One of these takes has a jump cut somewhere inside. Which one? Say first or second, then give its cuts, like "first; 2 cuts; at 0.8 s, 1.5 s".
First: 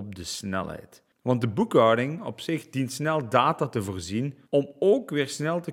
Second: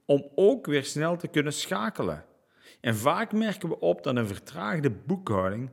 first; 2 cuts; at 1.1 s, 4.5 s